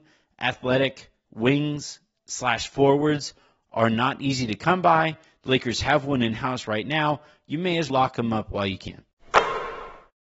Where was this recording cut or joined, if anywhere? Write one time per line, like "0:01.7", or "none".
0:07.9

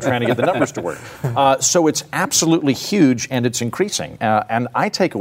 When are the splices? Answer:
none

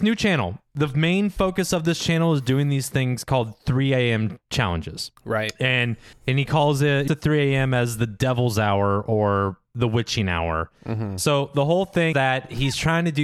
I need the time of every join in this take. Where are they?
0:05.2
0:06.1
0:07.1
0:12.1

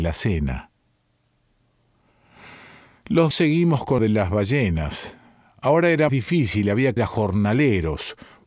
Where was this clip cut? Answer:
0:03.3
0:04.0
0:06.1
0:07.0

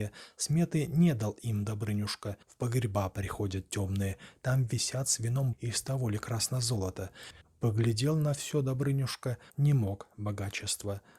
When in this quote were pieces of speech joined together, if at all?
0:02.4
0:05.5
0:07.4
0:09.5

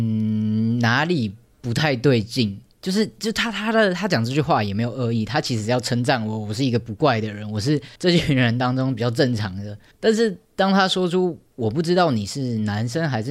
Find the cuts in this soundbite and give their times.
0:08.0
0:09.9
0:10.4

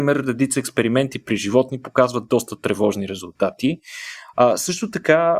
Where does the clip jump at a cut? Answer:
none

